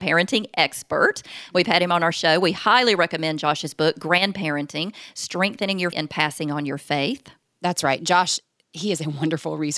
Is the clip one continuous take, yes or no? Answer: no